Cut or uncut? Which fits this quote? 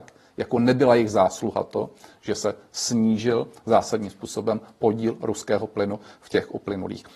uncut